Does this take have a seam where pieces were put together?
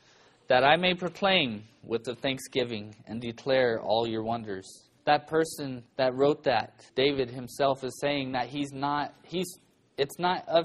yes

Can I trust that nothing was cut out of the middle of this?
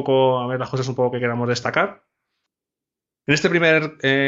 yes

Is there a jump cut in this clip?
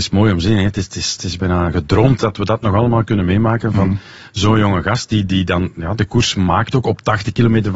no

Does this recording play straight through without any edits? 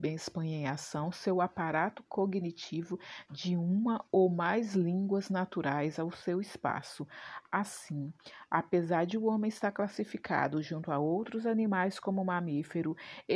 no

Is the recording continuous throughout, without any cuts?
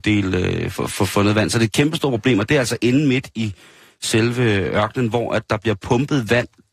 yes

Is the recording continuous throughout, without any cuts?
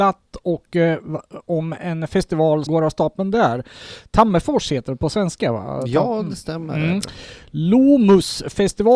no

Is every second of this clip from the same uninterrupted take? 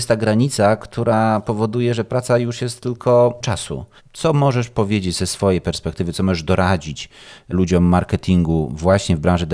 no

